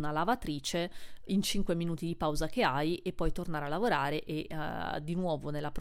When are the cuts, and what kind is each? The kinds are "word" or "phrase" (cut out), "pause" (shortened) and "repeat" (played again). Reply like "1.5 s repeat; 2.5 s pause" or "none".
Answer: 1.3 s word